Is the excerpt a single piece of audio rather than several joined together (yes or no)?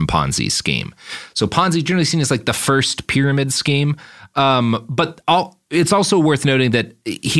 yes